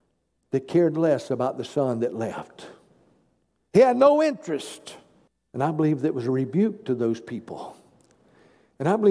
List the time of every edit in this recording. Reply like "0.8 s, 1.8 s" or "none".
5.3 s